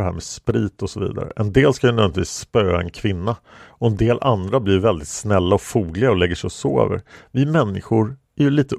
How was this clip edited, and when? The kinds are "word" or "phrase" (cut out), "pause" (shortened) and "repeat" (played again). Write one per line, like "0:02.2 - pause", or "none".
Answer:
none